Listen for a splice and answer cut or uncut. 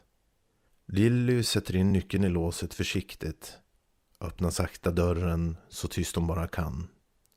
uncut